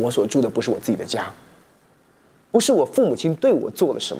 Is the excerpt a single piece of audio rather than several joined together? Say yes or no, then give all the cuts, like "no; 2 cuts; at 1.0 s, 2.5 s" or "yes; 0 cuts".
no; 1 cut; at 1.9 s